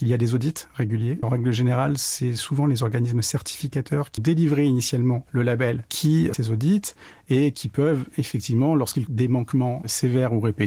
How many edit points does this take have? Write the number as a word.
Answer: four